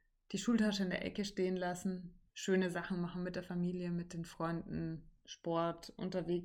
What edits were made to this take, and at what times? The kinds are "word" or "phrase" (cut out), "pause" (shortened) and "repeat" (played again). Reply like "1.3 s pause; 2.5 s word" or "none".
2.3 s pause